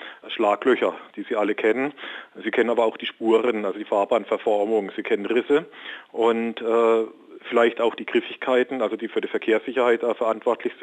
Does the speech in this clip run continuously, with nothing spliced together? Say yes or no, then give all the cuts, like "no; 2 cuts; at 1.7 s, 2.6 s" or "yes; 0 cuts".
yes; 0 cuts